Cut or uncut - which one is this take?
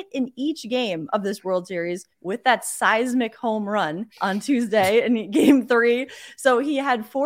cut